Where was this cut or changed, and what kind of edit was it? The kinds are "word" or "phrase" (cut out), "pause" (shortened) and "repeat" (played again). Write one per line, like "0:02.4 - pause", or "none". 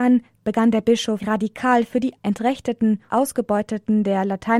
0:01.2 - word
0:02.2 - word
0:03.1 - word